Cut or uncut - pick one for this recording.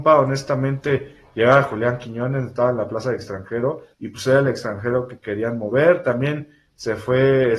cut